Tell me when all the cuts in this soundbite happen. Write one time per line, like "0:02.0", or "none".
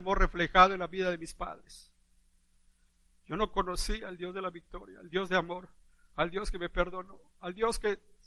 none